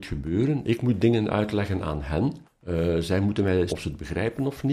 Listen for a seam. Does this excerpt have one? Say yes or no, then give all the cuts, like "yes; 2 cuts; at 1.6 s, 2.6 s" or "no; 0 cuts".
yes; 2 cuts; at 2.4 s, 3.7 s